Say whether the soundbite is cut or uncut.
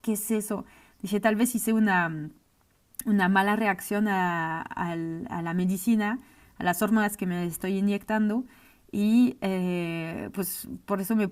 uncut